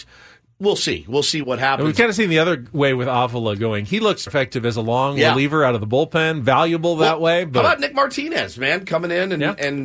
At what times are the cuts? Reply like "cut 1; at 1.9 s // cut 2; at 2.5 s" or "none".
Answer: cut 1; at 1.4 s // cut 2; at 4.3 s